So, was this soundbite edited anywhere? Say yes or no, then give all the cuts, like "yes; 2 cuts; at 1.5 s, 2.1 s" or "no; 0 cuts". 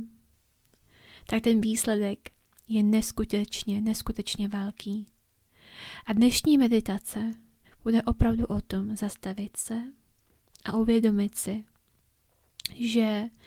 no; 0 cuts